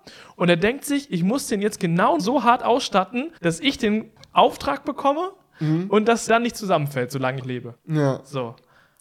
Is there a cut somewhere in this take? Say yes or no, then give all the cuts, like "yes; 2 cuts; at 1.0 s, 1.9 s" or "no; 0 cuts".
yes; 5 cuts; at 2.2 s, 3.4 s, 6.3 s, 7.4 s, 7.8 s